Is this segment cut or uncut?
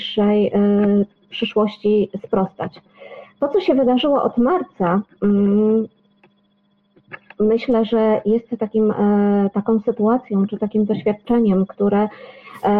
uncut